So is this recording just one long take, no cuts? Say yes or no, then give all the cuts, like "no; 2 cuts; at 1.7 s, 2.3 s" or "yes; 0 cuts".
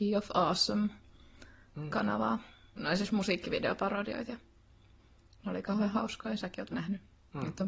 no; 1 cut; at 6.7 s